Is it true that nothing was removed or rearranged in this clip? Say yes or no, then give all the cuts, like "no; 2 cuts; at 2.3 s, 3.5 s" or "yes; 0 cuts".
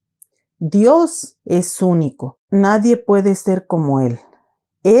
yes; 0 cuts